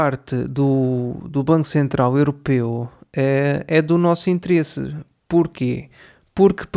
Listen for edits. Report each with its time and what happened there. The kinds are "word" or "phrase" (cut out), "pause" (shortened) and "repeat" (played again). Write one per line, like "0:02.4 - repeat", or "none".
none